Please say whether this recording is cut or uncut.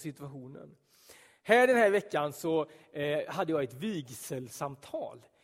uncut